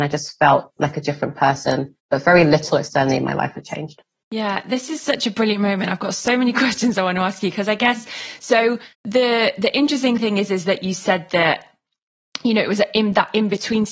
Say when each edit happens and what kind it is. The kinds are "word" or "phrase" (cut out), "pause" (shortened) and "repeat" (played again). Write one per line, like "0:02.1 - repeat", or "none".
0:02.0 - pause
0:08.9 - pause